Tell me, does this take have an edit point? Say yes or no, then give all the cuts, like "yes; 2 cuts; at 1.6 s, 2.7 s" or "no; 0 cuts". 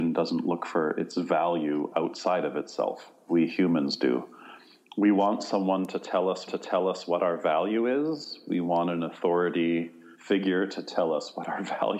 yes; 3 cuts; at 3.3 s, 6.5 s, 10.1 s